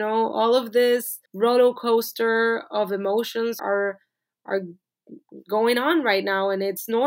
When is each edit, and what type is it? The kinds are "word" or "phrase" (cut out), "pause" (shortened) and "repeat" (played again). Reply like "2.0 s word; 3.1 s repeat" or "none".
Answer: 1.3 s pause; 3.6 s word